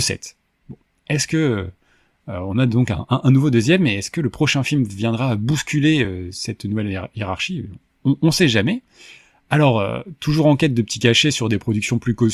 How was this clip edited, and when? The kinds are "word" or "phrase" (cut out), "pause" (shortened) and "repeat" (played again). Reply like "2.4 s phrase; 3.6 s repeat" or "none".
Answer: none